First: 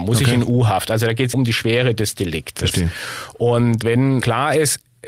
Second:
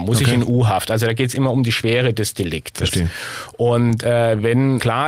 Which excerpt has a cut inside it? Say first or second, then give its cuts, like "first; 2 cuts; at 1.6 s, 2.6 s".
first; 2 cuts; at 1.3 s, 3.8 s